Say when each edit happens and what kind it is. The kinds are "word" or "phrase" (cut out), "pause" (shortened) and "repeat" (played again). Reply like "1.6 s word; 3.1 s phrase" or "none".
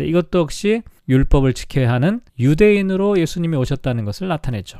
1.0 s pause; 2.3 s pause

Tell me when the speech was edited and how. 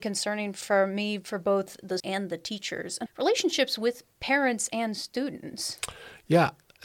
2.0 s word; 3.1 s word; 4.1 s pause

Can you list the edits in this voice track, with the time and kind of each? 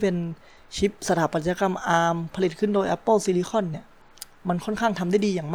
1.0 s pause

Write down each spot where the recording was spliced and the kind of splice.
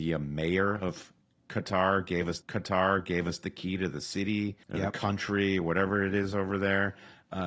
2.4 s repeat; 4.6 s pause

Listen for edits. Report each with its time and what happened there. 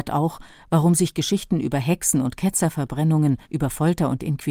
3.4 s pause

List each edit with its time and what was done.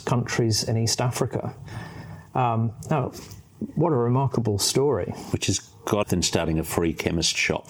6.0 s phrase

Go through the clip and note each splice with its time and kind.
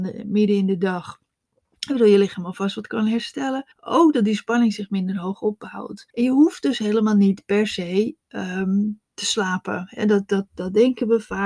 3.7 s pause; 6.1 s pause

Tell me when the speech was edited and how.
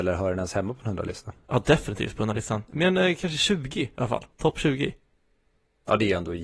4.3 s pause

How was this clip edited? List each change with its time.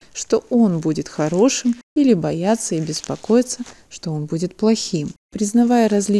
1.8 s pause; 5.2 s pause

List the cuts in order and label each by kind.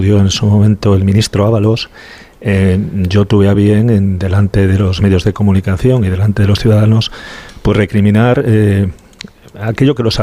none

